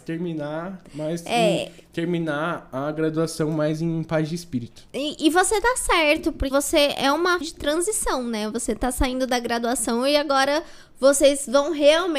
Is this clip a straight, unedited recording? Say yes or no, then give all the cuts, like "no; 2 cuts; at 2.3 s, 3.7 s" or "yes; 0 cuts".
no; 3 cuts; at 4.9 s, 6.5 s, 7.4 s